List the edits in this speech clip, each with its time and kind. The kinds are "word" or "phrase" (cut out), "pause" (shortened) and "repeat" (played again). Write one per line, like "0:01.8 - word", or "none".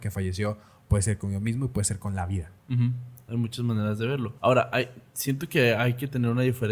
0:02.6 - pause
0:04.4 - pause